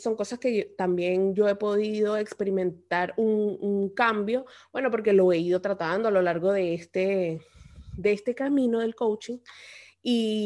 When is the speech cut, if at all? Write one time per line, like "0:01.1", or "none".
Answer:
none